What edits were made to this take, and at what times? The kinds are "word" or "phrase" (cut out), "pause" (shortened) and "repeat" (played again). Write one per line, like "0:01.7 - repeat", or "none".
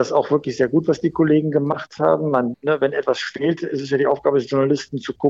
0:02.5 - word